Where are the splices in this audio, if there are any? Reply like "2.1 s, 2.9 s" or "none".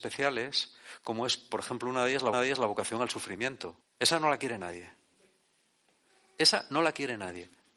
2.3 s, 3.8 s